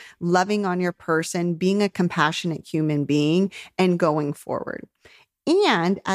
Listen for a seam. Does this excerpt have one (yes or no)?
no